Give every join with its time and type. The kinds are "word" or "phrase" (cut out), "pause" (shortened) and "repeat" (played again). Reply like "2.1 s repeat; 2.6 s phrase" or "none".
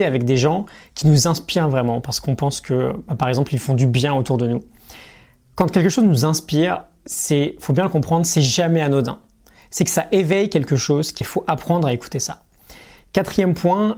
11.2 s phrase

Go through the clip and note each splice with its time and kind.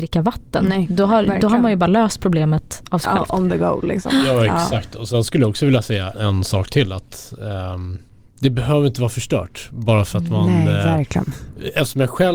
6.1 s word; 8.1 s pause

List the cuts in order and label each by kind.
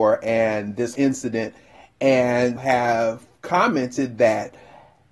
0.9 s word; 2.6 s phrase

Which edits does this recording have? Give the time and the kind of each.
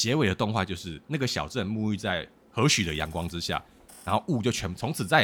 none

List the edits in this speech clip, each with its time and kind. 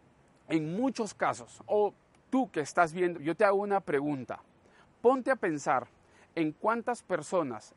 3.1 s phrase

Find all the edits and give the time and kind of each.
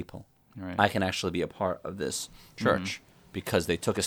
none

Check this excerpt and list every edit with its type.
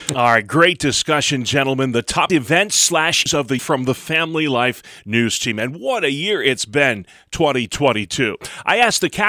2.3 s phrase; 3.3 s word; 3.6 s word

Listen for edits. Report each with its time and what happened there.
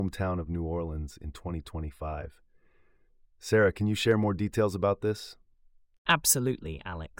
none

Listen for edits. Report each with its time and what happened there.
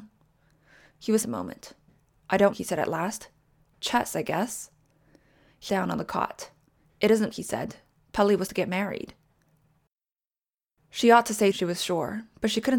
1.2 s word; 2.5 s word; 5.7 s word; 7.3 s word; 8.5 s word; 11.5 s word

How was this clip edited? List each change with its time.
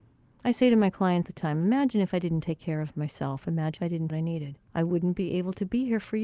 1.2 s word; 3.8 s word; 4.1 s phrase; 4.7 s pause

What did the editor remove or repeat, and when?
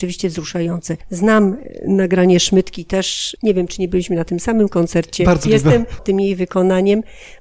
1.0 s pause; 5.4 s word; 6.0 s word

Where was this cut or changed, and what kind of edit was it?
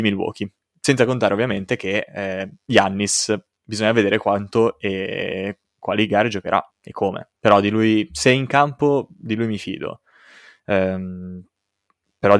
3.5 s pause; 6.7 s pause; 7.4 s pause

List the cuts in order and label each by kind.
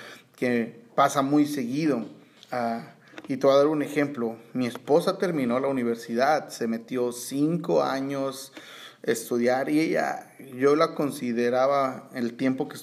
2.4 s pause

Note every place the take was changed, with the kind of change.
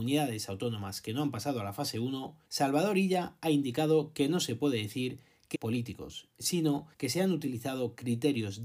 2.4 s pause; 5.5 s phrase; 6.9 s pause

